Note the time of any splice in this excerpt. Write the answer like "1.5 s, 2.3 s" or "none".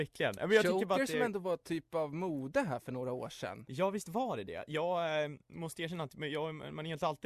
none